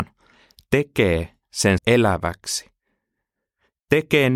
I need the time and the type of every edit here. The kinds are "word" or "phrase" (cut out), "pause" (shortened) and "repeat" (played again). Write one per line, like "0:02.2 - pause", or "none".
0:01.8 - phrase